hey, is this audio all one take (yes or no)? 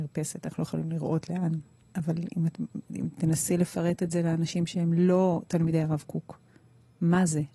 yes